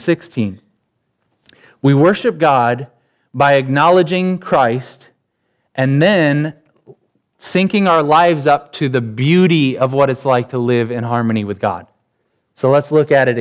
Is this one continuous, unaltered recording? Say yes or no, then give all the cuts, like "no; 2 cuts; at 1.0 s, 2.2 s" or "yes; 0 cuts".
yes; 0 cuts